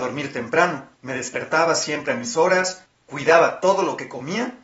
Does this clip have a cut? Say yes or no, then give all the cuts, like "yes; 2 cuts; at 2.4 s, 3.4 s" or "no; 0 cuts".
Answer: yes; 1 cut; at 0.9 s